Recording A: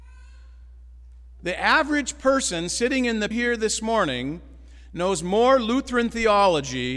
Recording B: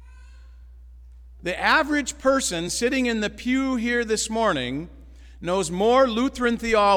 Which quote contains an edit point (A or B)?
A